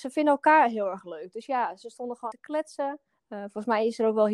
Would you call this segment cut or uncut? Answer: cut